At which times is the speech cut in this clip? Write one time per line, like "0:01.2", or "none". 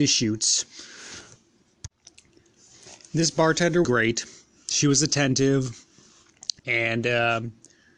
0:03.8
0:06.6